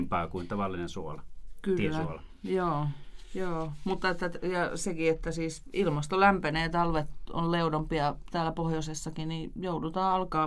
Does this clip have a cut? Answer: no; 0 cuts

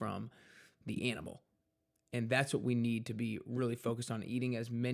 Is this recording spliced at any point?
no; 0 cuts

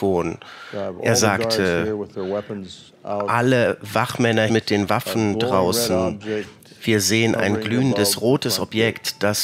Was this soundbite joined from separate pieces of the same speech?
yes; 1 cut; at 4.5 s

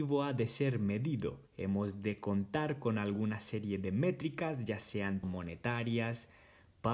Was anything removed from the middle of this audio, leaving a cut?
yes; 2 cuts; at 1.5 s, 5.2 s

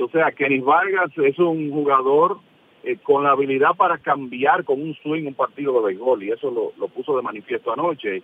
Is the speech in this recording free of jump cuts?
yes; 0 cuts

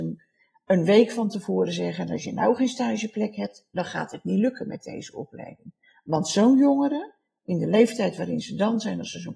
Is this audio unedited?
yes; 0 cuts

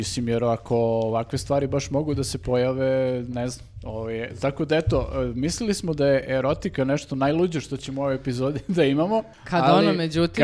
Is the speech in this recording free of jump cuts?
no; 1 cut; at 9.3 s

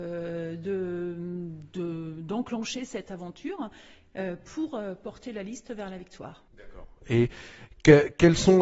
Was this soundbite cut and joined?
yes; 1 cut; at 6.5 s

